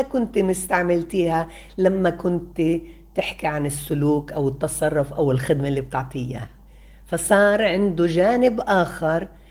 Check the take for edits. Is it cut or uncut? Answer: uncut